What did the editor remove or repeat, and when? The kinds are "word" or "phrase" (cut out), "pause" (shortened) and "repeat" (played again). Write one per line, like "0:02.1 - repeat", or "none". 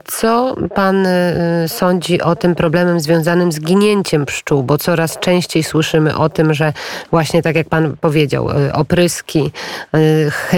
none